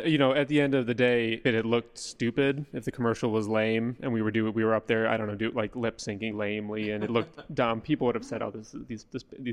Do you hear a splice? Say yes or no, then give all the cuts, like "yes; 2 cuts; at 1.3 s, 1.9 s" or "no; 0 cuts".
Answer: yes; 2 cuts; at 1.4 s, 6.3 s